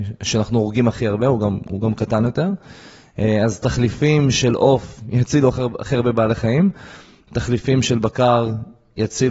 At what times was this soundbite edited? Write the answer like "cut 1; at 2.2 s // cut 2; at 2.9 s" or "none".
none